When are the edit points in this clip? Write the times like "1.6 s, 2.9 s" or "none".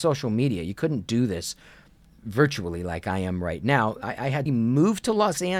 4.5 s